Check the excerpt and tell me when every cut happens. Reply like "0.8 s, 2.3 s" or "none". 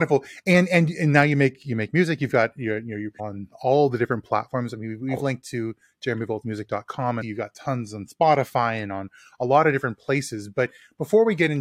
3.2 s, 7.2 s